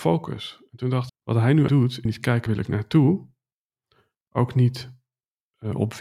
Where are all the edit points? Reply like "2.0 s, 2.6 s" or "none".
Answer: 1.1 s, 1.7 s, 2.1 s, 2.5 s